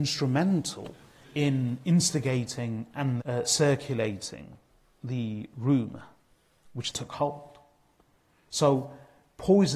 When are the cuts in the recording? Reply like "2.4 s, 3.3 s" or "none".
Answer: 3.2 s, 6.9 s